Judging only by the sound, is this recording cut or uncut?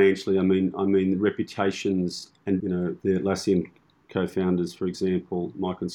uncut